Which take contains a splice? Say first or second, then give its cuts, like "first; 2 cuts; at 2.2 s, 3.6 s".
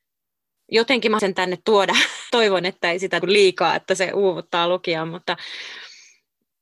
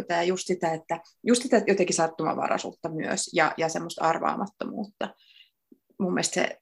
first; 3 cuts; at 1.2 s, 2.3 s, 3.2 s